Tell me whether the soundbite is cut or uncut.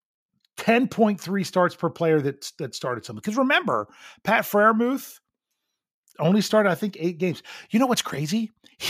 uncut